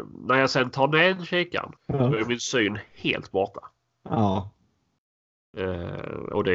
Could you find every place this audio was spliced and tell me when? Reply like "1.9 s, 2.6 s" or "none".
1.8 s